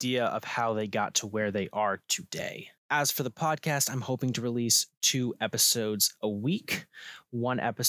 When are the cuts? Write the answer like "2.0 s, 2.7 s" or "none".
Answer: 2.8 s